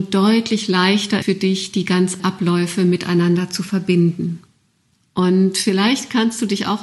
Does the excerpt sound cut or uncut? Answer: cut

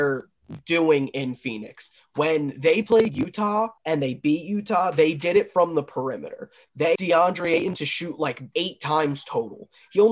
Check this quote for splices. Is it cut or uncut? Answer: cut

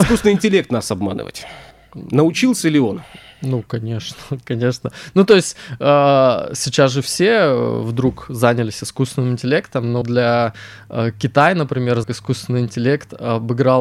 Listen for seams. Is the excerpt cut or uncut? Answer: cut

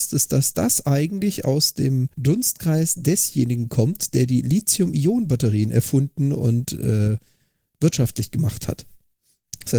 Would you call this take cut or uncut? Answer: cut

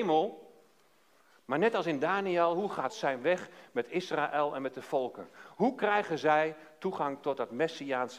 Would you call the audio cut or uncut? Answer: cut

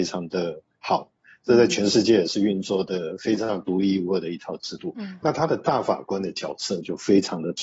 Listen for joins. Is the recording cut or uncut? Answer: uncut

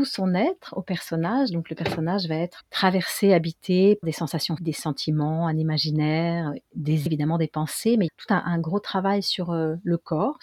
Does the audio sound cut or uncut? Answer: cut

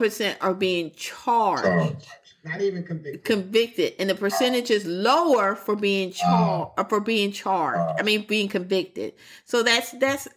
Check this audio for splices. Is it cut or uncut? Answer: uncut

